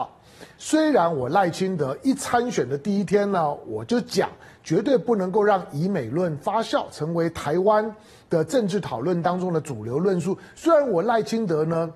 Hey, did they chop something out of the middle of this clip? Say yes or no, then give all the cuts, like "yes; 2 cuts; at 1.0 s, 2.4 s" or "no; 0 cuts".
no; 0 cuts